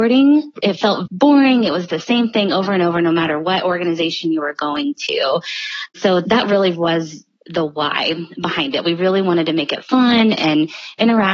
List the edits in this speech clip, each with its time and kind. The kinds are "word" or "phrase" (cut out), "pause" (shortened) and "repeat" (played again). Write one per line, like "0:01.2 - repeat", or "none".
0:01.1 - word

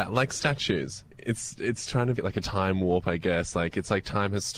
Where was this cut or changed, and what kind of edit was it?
0:02.2 - word

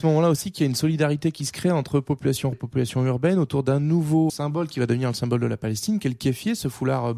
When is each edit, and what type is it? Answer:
0:02.5 - word
0:04.3 - word

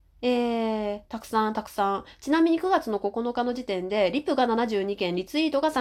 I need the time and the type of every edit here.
0:01.1 - pause

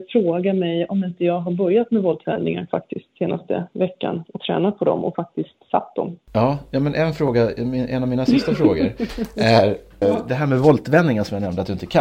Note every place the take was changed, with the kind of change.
0:10.0 - word

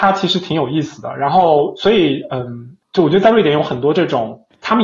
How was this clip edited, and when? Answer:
none

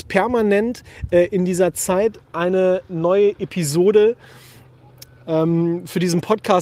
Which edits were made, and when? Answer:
none

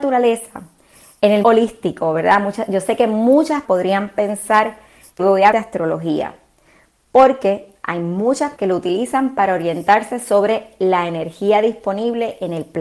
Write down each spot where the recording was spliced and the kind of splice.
0:01.4 - word
0:03.6 - word
0:05.2 - word
0:05.5 - word
0:08.6 - word

